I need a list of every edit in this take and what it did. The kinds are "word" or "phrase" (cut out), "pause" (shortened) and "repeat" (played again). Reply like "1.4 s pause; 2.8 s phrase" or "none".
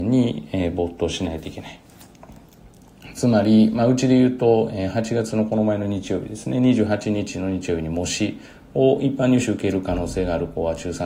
none